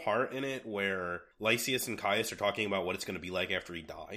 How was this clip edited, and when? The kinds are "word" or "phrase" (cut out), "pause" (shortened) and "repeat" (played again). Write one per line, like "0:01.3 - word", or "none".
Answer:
0:01.3 - pause

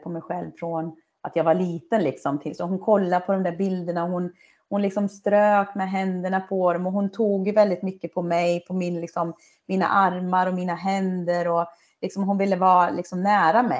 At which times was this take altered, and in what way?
none

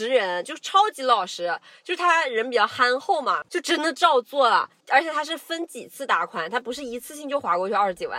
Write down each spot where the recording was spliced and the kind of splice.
none

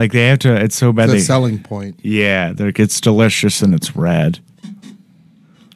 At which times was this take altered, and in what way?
none

